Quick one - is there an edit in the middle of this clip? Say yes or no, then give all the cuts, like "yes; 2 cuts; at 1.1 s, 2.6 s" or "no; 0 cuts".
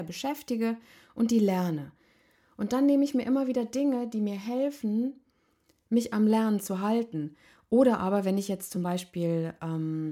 no; 0 cuts